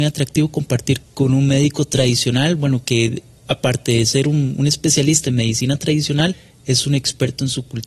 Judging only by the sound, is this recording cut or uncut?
uncut